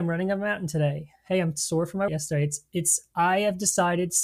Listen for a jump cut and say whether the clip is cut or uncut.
cut